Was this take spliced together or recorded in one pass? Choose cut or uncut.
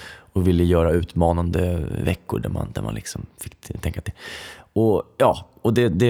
uncut